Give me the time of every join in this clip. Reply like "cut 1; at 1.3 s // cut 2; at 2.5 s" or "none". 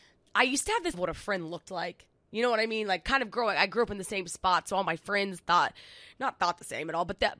cut 1; at 0.9 s